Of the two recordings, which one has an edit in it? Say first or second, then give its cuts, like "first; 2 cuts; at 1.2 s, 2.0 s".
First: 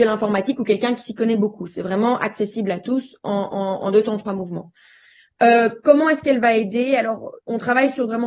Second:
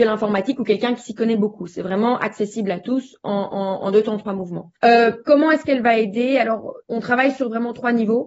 second; 1 cut; at 4.8 s